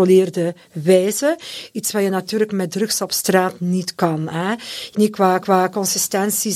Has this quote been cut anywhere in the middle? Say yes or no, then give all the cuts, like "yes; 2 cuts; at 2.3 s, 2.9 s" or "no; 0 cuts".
yes; 2 cuts; at 4.9 s, 5.4 s